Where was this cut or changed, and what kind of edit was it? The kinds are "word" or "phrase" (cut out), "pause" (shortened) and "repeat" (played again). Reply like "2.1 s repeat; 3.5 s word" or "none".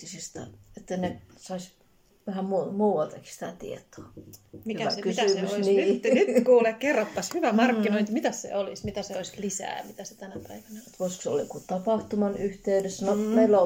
none